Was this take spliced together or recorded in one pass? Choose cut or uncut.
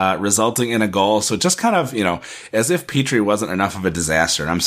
uncut